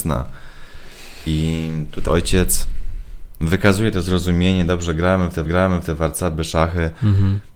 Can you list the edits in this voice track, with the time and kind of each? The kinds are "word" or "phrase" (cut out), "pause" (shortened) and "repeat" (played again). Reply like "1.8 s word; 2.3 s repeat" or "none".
2.1 s word; 5.5 s repeat

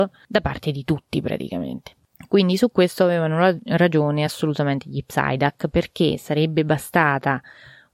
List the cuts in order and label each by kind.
none

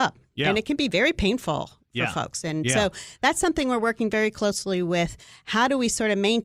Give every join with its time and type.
none

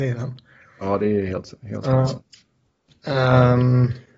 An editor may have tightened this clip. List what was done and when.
1.6 s pause

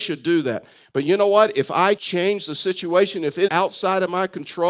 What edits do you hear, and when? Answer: 2.0 s word; 3.5 s word

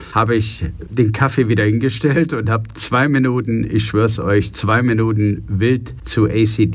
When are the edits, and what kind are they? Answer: none

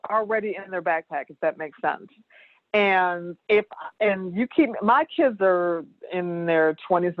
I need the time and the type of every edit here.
3.4 s pause

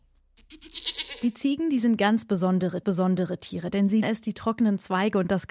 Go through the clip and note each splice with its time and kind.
2.8 s repeat; 4.0 s word

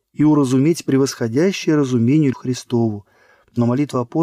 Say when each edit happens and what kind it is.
2.3 s word

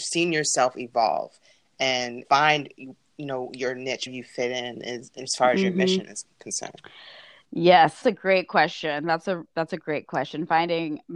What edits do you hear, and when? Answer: 2.2 s word; 4.1 s phrase; 6.3 s pause; 8.0 s word

